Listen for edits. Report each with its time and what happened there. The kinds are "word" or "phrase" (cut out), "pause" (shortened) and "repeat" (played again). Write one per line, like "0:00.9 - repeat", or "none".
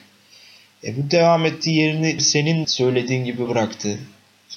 0:02.2 - word
0:02.6 - word
0:03.5 - word